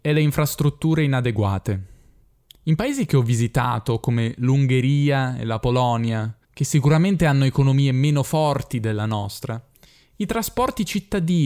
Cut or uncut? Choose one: cut